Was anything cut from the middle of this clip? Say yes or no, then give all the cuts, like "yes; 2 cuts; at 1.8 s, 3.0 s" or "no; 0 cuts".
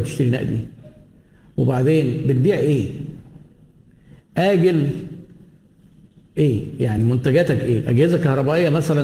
no; 0 cuts